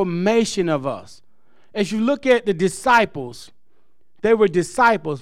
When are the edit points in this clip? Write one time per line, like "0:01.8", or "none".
none

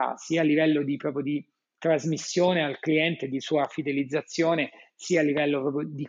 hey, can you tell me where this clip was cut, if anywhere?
none

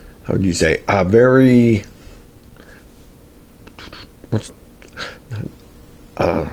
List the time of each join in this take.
0:04.5

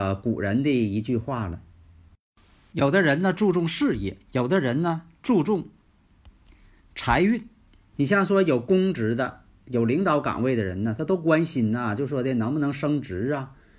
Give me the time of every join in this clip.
none

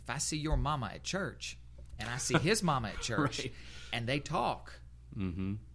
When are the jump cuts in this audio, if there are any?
none

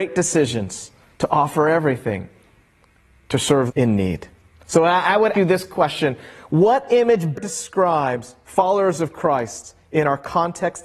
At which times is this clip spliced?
0:03.7
0:05.3
0:07.3

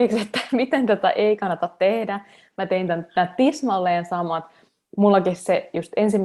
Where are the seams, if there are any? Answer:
none

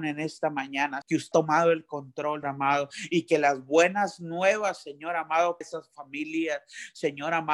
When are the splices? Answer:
0:01.0
0:01.3
0:02.4
0:05.6

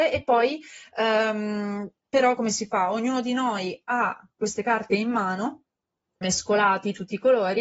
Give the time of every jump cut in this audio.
0:06.2

